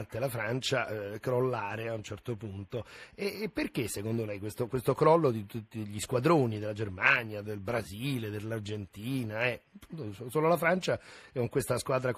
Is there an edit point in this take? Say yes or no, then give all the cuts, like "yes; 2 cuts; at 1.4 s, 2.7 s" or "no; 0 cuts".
yes; 1 cut; at 7.4 s